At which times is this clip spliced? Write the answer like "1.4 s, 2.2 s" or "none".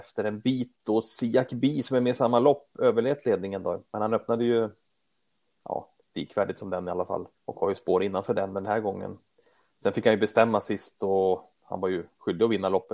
3.9 s, 7.3 s, 11.5 s